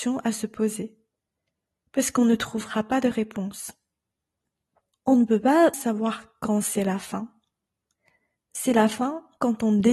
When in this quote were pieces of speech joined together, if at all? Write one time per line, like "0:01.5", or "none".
0:05.7